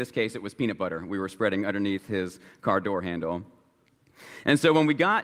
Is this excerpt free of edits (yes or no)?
yes